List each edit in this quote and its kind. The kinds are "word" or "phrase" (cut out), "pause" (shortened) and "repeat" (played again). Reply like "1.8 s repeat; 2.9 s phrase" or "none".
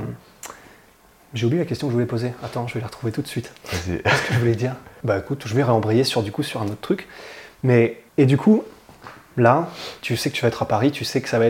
8.1 s pause